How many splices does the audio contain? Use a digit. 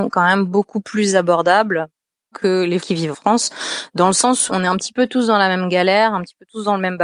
4